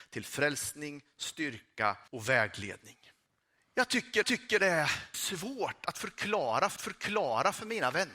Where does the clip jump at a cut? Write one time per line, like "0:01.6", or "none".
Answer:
0:02.1
0:03.3
0:04.2
0:05.1
0:06.8